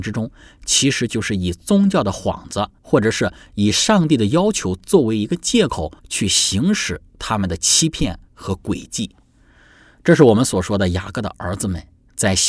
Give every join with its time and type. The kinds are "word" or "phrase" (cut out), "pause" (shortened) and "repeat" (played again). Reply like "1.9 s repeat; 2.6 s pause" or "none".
2.8 s pause; 6.0 s pause